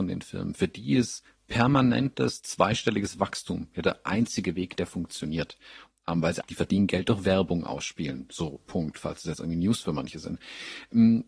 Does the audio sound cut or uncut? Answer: cut